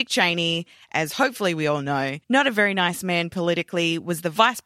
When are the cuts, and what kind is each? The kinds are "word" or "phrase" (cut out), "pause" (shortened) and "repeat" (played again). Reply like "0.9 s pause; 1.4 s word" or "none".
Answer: 2.2 s pause